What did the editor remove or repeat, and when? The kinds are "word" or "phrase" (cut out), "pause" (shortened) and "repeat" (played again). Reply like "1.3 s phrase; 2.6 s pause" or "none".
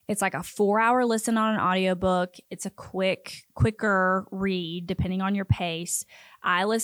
none